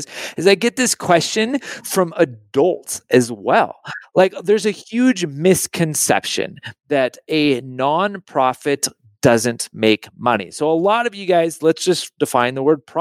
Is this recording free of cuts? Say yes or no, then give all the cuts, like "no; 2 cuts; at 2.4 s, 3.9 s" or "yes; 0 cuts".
yes; 0 cuts